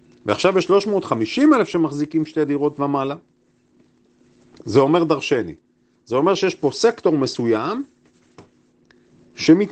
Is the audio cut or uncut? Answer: uncut